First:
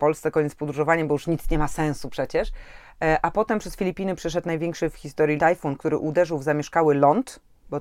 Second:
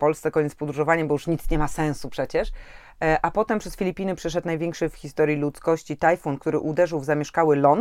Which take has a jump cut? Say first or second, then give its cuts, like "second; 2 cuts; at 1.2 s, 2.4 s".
first; 1 cut; at 5.4 s